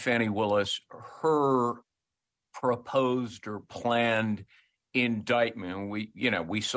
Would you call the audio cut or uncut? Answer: uncut